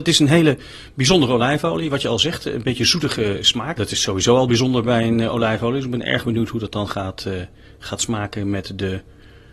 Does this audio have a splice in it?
no; 0 cuts

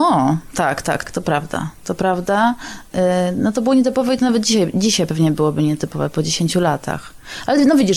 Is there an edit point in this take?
yes; 1 cut; at 1.0 s

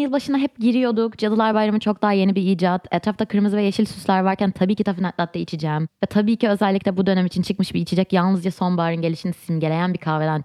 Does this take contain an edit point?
no; 0 cuts

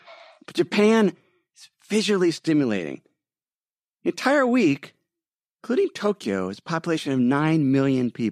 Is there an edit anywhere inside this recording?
no; 0 cuts

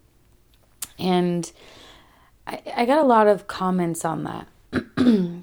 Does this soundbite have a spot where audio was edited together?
no; 0 cuts

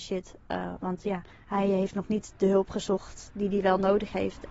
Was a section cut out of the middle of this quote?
yes; 1 cut; at 1.3 s

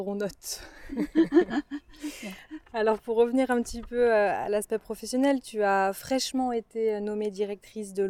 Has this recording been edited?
no; 0 cuts

